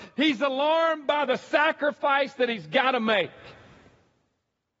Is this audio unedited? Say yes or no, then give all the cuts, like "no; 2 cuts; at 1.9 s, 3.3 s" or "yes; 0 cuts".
yes; 0 cuts